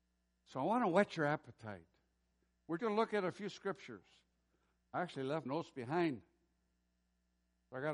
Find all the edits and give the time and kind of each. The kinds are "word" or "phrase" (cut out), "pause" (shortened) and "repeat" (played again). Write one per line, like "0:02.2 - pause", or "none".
0:02.8 - word
0:05.5 - word